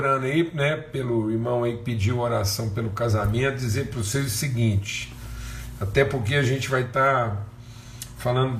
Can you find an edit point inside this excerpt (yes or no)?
no